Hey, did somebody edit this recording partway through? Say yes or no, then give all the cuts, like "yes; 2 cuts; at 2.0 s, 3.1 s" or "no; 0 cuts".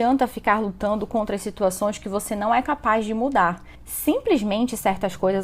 no; 0 cuts